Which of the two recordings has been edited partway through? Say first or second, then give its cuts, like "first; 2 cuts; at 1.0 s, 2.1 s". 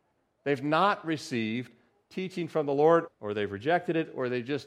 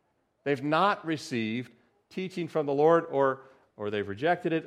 first; 1 cut; at 3.1 s